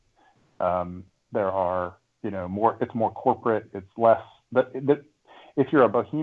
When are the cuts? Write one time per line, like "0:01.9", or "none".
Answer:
none